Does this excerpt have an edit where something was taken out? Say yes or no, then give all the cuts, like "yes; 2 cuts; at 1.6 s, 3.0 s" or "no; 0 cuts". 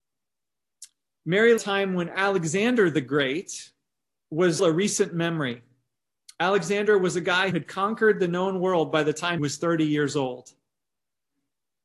yes; 4 cuts; at 1.6 s, 4.6 s, 7.5 s, 9.4 s